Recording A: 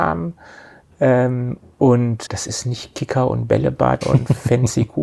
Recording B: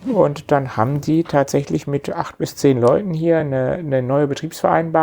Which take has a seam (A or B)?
A